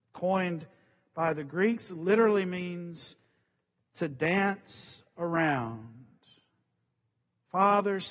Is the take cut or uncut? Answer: uncut